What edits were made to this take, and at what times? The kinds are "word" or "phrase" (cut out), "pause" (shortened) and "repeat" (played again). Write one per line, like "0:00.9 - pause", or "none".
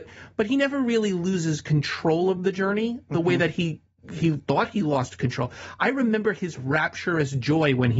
none